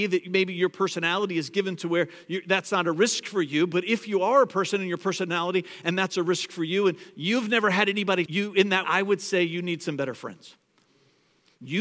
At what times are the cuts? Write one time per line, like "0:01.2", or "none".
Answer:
0:08.3
0:08.8